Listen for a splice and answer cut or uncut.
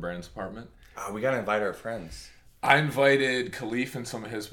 uncut